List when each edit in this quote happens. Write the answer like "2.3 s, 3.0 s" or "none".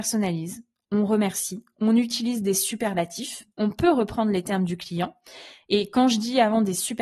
3.5 s